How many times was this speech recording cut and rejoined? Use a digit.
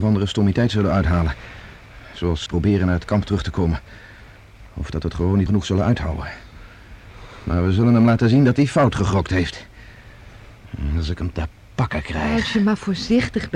3